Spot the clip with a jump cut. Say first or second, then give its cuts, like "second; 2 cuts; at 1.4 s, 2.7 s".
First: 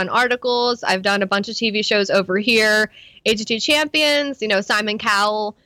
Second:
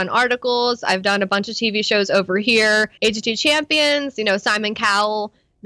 second; 1 cut; at 3.0 s